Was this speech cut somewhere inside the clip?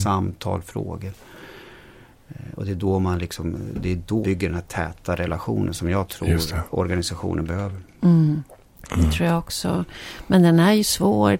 yes; 1 cut; at 4.2 s

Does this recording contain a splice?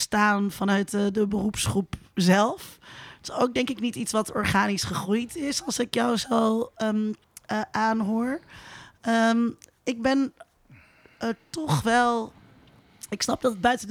no; 0 cuts

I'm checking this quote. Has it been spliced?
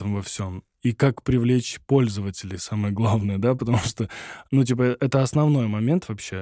no; 0 cuts

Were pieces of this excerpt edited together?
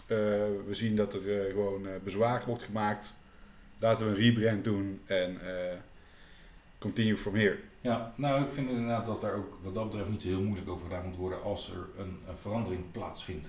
no; 0 cuts

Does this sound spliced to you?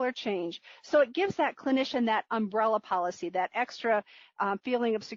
no; 0 cuts

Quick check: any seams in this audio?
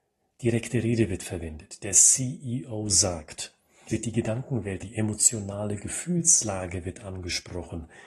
yes; 2 cuts; at 3.9 s, 4.8 s

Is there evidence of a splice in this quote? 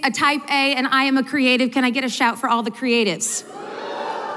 no; 0 cuts

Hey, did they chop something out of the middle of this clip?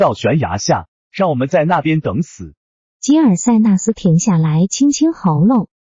no; 0 cuts

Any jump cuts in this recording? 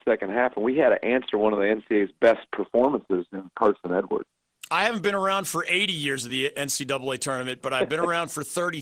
no; 0 cuts

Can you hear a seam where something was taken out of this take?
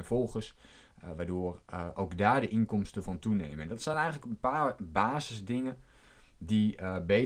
no; 0 cuts

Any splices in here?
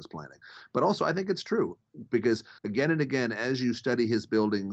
yes; 1 cut; at 2.6 s

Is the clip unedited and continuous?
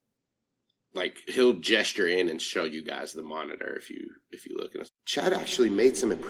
no; 1 cut; at 4.9 s

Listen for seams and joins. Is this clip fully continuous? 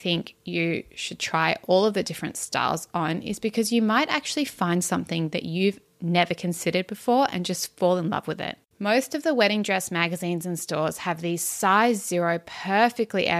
no; 1 cut; at 8.7 s

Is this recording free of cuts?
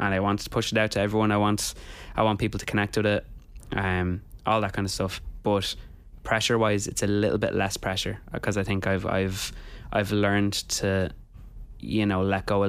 yes; 0 cuts

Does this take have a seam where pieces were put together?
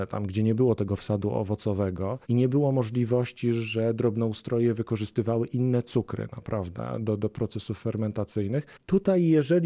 yes; 2 cuts; at 2.2 s, 7.0 s

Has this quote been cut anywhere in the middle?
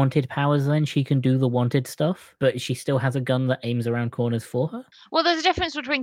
no; 0 cuts

